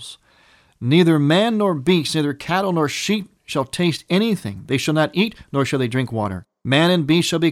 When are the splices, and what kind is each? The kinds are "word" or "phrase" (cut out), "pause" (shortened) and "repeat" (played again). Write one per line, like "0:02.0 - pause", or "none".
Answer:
none